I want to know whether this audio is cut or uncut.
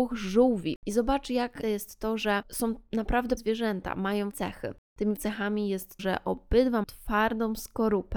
cut